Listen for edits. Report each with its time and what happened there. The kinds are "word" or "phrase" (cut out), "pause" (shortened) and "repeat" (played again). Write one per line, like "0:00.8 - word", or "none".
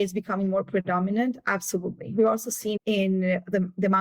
0:02.8 - word